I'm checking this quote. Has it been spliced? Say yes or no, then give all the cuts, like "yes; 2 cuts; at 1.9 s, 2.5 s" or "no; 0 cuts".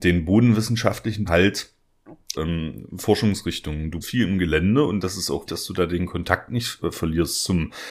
yes; 4 cuts; at 1.3 s, 2.3 s, 4.0 s, 5.5 s